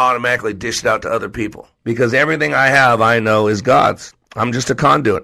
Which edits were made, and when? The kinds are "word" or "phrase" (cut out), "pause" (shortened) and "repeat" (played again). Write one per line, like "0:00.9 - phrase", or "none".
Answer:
0:01.7 - pause